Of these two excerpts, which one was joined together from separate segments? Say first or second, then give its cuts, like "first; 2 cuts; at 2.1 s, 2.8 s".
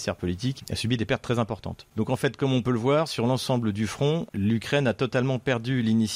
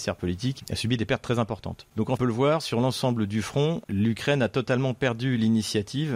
second; 1 cut; at 2.2 s